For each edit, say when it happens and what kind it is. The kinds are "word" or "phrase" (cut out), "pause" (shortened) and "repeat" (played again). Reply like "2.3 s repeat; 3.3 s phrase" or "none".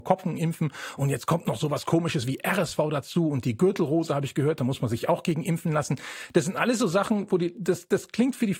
none